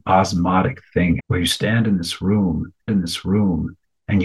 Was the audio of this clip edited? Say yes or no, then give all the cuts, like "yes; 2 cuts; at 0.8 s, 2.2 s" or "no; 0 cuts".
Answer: yes; 2 cuts; at 1.2 s, 2.9 s